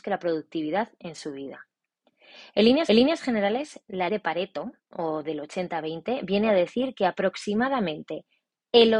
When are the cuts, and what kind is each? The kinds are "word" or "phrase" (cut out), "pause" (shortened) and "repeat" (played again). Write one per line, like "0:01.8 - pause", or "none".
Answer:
0:02.9 - repeat
0:04.1 - word